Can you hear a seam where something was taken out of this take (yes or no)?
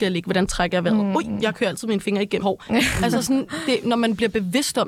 yes